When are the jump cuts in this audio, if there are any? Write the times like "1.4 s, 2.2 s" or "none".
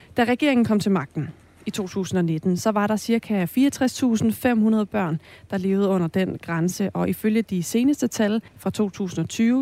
8.5 s